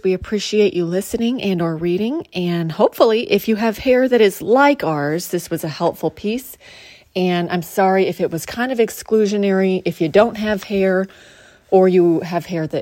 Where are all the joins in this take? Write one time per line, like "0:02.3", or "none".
none